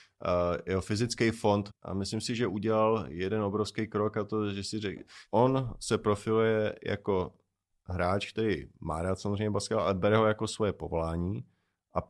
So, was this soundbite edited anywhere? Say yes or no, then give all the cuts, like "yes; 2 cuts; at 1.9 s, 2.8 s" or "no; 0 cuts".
yes; 1 cut; at 1.7 s